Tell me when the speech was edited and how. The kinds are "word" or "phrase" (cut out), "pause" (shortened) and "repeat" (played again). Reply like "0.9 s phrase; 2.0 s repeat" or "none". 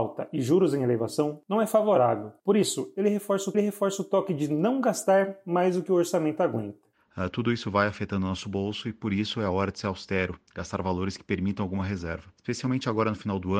3.5 s repeat